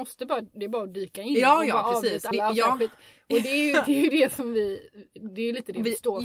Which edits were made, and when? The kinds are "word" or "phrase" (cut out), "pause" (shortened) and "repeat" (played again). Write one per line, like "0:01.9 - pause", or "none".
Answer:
0:02.3 - word